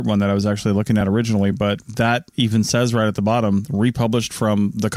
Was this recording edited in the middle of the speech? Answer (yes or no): no